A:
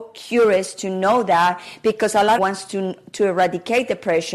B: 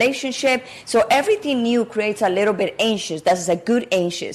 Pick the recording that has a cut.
A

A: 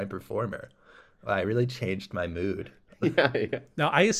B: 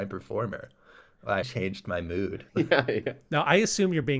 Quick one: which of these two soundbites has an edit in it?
B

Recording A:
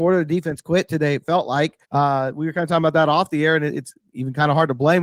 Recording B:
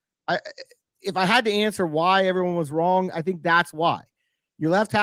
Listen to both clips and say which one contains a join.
A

